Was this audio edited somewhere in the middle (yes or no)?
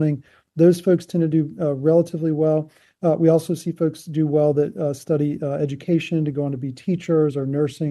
no